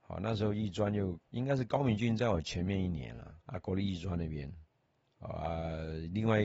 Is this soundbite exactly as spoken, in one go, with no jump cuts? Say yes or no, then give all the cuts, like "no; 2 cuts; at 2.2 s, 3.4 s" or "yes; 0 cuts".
no; 2 cuts; at 1.2 s, 3.4 s